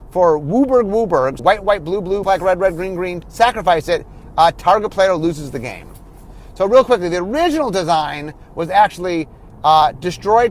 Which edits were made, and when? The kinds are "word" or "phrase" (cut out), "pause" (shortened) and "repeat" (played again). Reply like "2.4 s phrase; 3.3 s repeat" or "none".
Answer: 1.4 s word; 2.2 s word; 3.2 s word